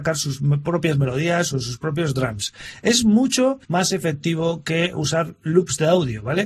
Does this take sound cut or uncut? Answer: cut